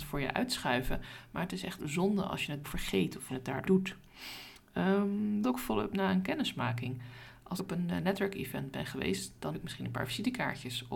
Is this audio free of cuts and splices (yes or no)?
no